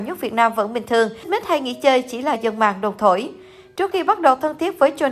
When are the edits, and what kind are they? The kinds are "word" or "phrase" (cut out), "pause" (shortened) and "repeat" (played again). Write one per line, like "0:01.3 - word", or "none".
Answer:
0:01.2 - word
0:02.4 - word
0:03.9 - word